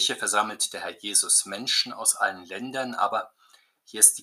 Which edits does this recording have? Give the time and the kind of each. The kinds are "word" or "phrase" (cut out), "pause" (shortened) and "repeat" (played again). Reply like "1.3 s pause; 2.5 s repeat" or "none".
none